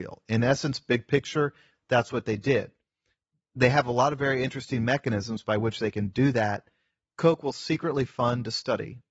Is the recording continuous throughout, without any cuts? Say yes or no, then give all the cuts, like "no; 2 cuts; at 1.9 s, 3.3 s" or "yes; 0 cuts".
yes; 0 cuts